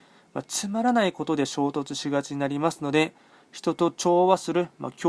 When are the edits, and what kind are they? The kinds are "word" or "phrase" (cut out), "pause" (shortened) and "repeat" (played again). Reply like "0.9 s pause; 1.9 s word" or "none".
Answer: none